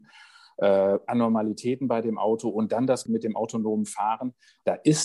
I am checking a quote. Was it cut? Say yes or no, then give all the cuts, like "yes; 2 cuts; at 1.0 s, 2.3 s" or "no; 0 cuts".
yes; 1 cut; at 3.1 s